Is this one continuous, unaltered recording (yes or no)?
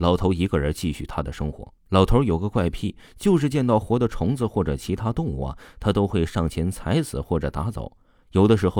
no